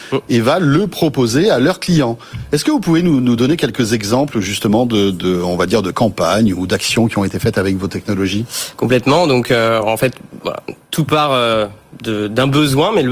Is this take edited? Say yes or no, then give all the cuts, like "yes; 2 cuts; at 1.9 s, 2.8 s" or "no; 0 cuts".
no; 0 cuts